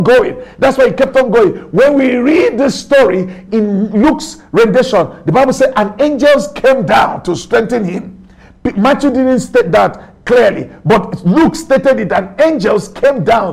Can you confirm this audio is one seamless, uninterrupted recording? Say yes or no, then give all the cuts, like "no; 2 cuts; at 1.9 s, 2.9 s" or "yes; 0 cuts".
no; 1 cut; at 3.5 s